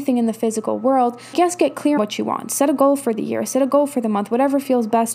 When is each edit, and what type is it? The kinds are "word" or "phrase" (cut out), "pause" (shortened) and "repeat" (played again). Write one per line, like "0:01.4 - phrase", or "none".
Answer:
0:01.3 - word
0:02.0 - word